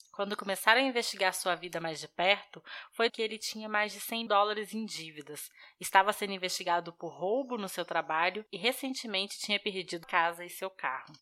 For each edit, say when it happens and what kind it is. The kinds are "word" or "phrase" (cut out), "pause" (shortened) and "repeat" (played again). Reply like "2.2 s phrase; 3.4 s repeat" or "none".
3.1 s word; 4.3 s word; 10.0 s word